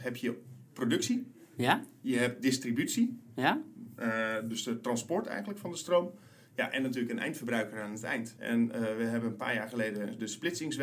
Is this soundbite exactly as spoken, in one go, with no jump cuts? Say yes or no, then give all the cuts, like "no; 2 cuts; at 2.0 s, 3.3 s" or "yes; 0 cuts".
yes; 0 cuts